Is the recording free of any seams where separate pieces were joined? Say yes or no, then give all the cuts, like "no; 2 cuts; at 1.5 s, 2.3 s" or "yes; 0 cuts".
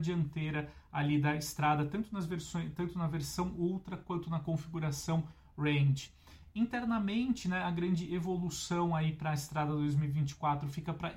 yes; 0 cuts